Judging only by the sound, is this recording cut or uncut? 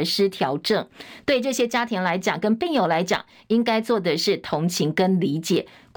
uncut